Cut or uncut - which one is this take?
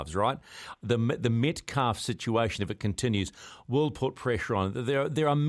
uncut